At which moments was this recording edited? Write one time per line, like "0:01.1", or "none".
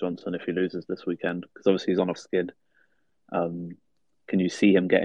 0:02.2